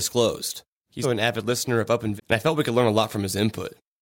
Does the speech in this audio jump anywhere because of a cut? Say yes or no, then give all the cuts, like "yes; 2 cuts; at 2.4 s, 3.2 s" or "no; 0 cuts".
yes; 2 cuts; at 1.0 s, 2.2 s